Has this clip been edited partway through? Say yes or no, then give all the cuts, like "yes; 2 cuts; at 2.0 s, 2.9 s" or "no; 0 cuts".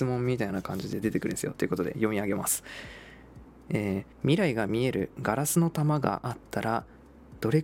yes; 1 cut; at 4.1 s